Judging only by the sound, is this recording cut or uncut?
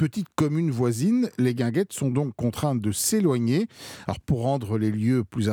uncut